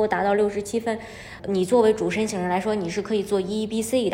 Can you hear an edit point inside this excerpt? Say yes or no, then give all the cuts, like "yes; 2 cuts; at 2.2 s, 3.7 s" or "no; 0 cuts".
yes; 1 cut; at 1.4 s